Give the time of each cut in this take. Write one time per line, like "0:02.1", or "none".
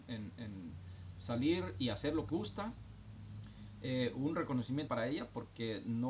0:02.3
0:04.9